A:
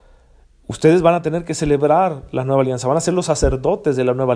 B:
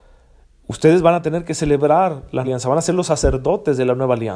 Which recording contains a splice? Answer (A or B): B